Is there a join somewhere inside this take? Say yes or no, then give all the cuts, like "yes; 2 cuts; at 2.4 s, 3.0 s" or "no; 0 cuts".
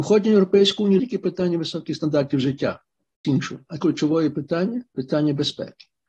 yes; 4 cuts; at 1.0 s, 3.2 s, 3.8 s, 4.9 s